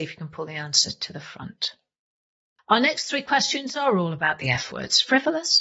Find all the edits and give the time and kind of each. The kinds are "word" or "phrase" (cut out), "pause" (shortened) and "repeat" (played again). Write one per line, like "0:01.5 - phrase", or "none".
none